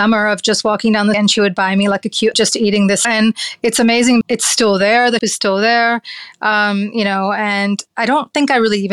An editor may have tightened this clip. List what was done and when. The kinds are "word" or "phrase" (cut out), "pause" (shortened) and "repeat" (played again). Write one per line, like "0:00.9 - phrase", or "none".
0:01.1 - word
0:02.3 - phrase
0:03.0 - word
0:04.2 - word
0:05.2 - word